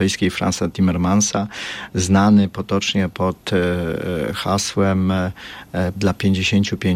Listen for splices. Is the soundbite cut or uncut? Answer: cut